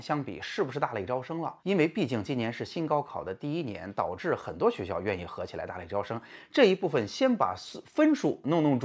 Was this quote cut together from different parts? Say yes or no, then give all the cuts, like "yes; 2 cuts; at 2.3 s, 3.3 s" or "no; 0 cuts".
yes; 1 cut; at 1.6 s